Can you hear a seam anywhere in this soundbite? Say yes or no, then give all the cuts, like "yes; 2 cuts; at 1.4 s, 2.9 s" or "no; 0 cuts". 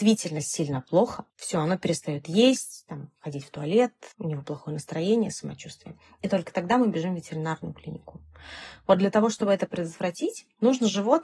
yes; 2 cuts; at 1.3 s, 4.1 s